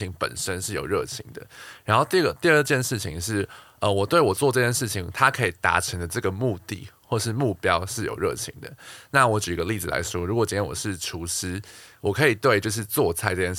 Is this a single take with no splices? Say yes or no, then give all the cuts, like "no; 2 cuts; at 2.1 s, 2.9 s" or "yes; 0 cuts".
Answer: yes; 0 cuts